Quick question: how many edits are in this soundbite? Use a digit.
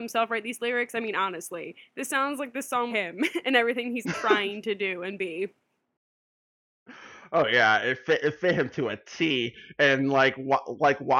3